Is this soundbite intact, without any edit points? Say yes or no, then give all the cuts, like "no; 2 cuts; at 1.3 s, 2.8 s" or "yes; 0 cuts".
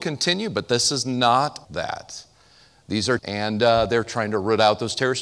no; 2 cuts; at 1.6 s, 3.2 s